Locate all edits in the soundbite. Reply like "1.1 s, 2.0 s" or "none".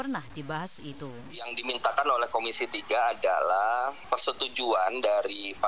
none

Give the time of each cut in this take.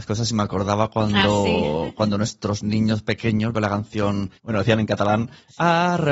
3.5 s, 4.4 s

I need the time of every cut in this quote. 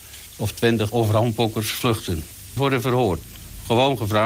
0.9 s, 2.6 s

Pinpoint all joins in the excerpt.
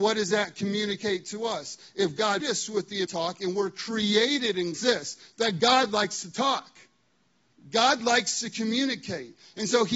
2.4 s, 3.1 s, 4.7 s

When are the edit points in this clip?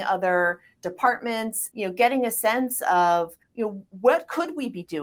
1.7 s, 3.4 s

